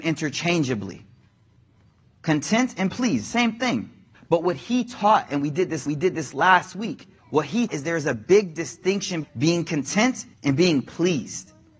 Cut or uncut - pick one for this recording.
cut